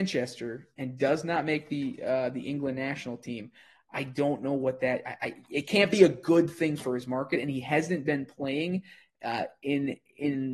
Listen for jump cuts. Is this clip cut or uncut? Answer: uncut